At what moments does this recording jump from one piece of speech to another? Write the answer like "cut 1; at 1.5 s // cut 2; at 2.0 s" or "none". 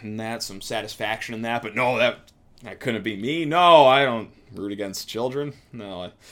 none